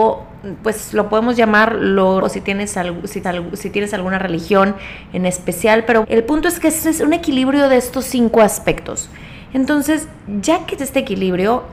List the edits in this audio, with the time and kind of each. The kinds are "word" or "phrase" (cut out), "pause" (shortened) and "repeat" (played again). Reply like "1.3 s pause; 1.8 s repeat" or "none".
2.2 s word; 3.2 s repeat; 6.0 s word; 10.8 s word